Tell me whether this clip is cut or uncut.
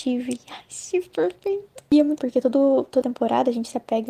cut